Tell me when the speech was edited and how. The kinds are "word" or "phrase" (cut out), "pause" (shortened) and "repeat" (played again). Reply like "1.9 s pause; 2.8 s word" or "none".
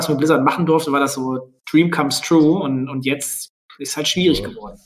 1.6 s pause; 3.7 s pause